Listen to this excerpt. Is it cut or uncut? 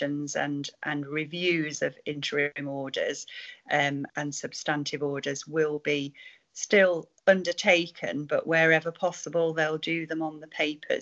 cut